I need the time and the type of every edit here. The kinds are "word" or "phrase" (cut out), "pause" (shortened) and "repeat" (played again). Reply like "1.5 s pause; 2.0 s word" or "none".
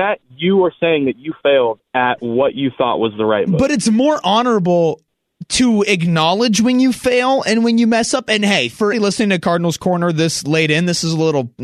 1.9 s pause; 8.9 s word